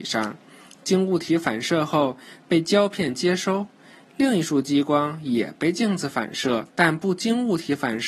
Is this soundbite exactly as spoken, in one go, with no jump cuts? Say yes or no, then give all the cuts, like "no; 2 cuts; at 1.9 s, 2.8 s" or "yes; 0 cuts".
no; 1 cut; at 6.7 s